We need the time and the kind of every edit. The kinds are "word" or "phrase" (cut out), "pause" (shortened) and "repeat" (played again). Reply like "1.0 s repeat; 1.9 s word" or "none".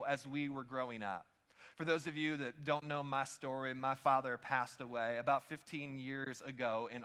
none